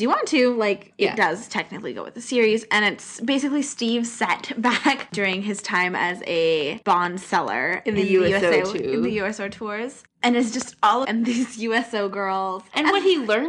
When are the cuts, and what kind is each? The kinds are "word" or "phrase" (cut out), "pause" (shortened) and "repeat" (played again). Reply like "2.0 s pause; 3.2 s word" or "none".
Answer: 6.8 s pause; 11.0 s phrase